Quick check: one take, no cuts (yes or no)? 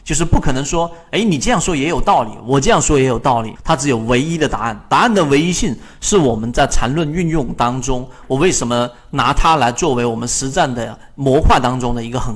no